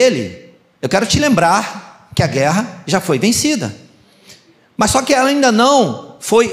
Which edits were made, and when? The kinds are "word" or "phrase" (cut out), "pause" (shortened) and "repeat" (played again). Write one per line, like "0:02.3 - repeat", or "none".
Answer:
none